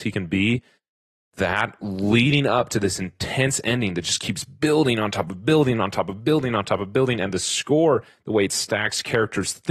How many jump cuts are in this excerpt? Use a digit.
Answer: 0